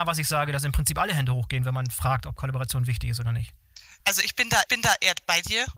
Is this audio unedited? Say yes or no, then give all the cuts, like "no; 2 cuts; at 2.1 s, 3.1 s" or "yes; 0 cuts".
no; 2 cuts; at 4.0 s, 4.7 s